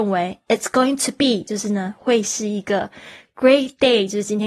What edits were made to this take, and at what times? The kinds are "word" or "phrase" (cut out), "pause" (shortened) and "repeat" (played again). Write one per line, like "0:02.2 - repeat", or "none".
none

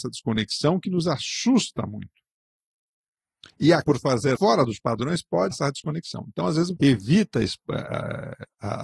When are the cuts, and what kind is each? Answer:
0:03.8 - word
0:04.4 - word
0:05.5 - word
0:06.8 - word

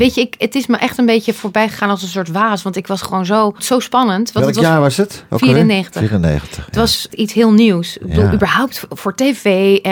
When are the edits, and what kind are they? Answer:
0:03.6 - word
0:07.1 - phrase

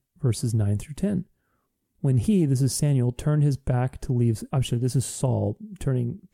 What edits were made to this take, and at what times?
0:04.5 - word

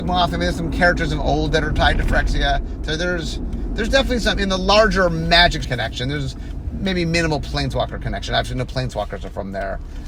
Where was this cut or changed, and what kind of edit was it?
0:05.6 - phrase

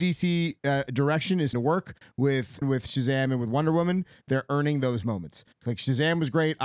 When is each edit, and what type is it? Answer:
0:01.5 - word
0:02.6 - word

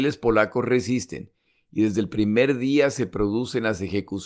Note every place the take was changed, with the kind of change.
none

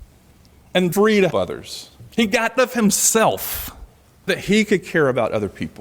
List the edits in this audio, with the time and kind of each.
0:00.9 - phrase
0:01.3 - word
0:02.1 - pause
0:02.6 - word
0:04.3 - word

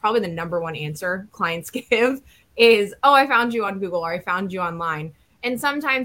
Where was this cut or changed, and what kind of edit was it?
none

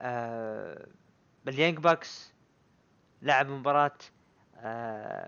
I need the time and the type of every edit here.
none

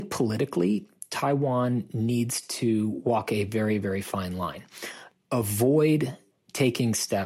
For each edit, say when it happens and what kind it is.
none

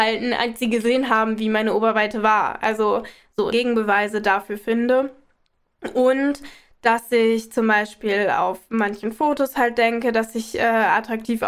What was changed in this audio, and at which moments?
0:03.5 - phrase

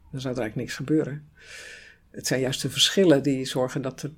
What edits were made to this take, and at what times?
none

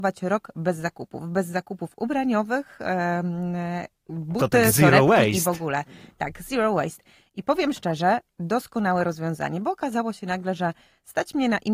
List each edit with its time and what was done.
none

